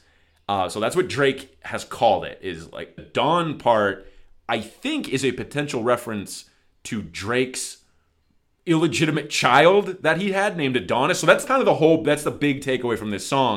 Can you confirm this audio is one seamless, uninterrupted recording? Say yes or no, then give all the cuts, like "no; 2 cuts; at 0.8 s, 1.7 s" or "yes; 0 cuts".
no; 2 cuts; at 3.0 s, 11.5 s